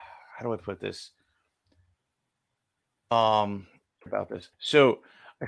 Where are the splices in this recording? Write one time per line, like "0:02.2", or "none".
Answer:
0:04.1
0:04.5